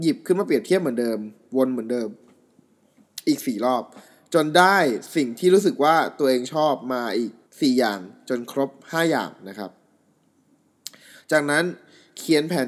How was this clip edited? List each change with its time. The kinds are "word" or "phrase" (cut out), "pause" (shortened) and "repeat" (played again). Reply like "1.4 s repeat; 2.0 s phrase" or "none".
7.4 s pause

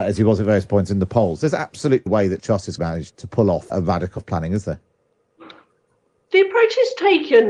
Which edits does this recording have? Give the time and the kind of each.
2.1 s word; 2.4 s word; 2.8 s word; 3.1 s word; 3.7 s word; 4.2 s word

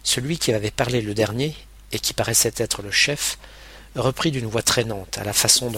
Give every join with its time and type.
none

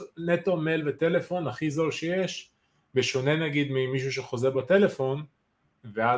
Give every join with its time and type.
none

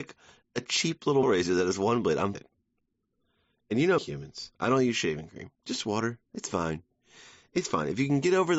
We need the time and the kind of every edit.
1.2 s word; 2.3 s phrase; 4.0 s word; 5.5 s pause; 6.3 s pause

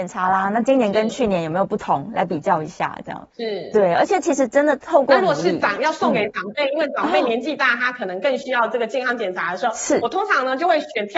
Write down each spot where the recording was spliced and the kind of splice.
3.3 s pause

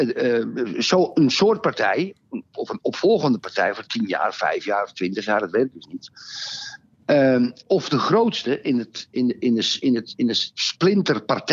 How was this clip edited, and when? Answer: 7.6 s word

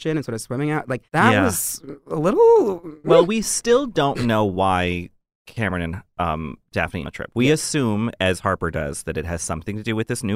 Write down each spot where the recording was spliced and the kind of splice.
1.1 s pause; 7.0 s phrase

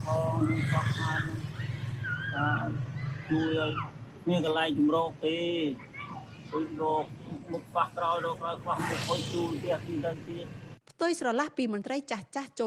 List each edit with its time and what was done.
10.8 s pause

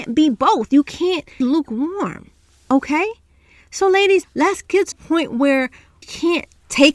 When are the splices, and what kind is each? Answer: 1.4 s word; 4.2 s word; 4.9 s word; 6.0 s word

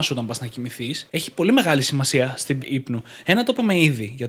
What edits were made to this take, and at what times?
1.1 s pause; 2.6 s word

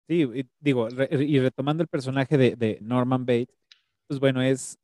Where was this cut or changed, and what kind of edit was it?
2.8 s word

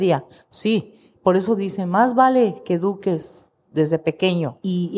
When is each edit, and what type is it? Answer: none

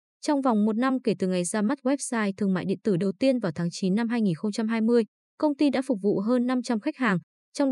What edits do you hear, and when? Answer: none

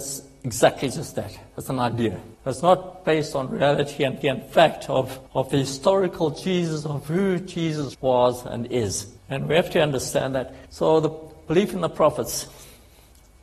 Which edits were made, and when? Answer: 2.3 s pause; 4.2 s repeat; 5.3 s pause; 7.9 s word; 9.2 s pause; 10.7 s pause

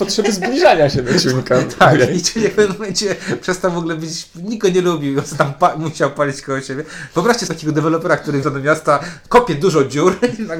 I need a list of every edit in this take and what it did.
2.1 s word; 7.5 s word; 8.4 s word

